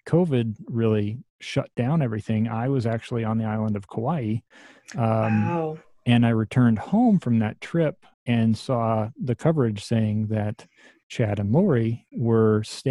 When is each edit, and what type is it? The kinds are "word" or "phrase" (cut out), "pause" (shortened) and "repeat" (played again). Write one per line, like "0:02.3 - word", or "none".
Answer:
0:08.1 - pause